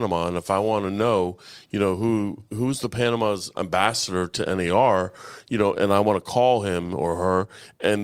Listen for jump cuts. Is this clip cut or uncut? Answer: cut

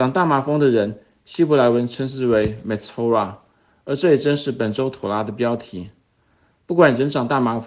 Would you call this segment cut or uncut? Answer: uncut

